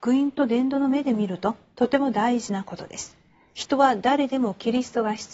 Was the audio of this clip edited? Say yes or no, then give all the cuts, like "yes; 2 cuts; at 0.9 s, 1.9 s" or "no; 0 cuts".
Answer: no; 0 cuts